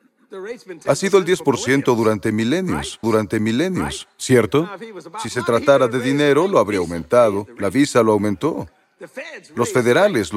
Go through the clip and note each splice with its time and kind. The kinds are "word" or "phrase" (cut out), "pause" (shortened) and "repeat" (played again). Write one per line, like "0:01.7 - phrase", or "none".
0:03.0 - repeat

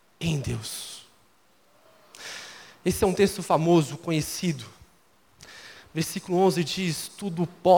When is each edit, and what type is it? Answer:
none

